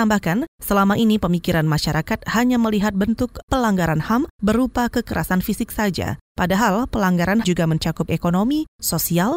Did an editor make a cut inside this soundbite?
yes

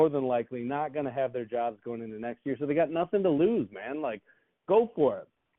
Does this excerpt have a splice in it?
no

